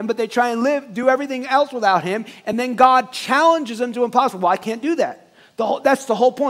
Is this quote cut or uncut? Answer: uncut